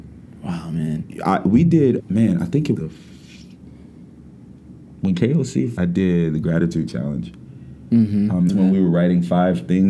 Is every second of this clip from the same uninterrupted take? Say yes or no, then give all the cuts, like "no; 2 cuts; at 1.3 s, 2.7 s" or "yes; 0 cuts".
no; 4 cuts; at 2.0 s, 2.8 s, 5.8 s, 8.5 s